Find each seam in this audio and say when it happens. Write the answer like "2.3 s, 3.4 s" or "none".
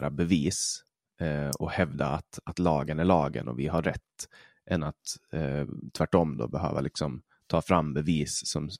none